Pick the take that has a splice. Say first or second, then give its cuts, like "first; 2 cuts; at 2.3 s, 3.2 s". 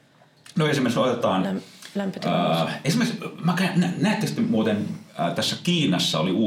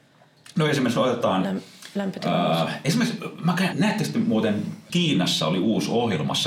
second; 2 cuts; at 3.7 s, 4.9 s